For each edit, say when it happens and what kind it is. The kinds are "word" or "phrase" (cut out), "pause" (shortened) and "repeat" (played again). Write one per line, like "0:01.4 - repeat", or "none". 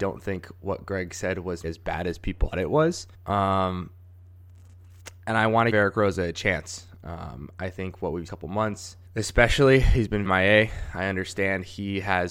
0:01.6 - word
0:02.5 - word
0:03.1 - pause
0:05.7 - phrase
0:08.3 - phrase
0:09.1 - pause
0:10.3 - word